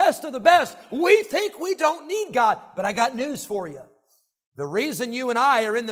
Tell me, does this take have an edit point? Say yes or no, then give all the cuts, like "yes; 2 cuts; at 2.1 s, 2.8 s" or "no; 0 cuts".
no; 0 cuts